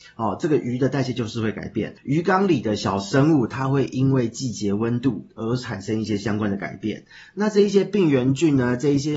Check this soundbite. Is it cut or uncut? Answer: cut